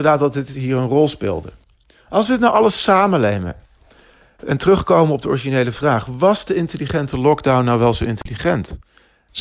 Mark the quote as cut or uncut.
uncut